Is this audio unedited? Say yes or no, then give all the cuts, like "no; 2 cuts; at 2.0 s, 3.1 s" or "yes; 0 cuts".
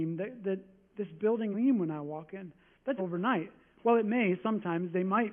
no; 2 cuts; at 1.5 s, 3.0 s